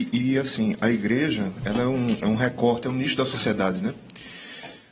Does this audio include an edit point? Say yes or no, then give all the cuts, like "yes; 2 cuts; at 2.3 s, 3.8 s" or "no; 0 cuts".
no; 0 cuts